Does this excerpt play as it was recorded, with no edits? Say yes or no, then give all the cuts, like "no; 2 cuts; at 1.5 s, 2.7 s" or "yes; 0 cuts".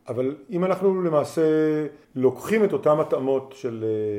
no; 1 cut; at 2.0 s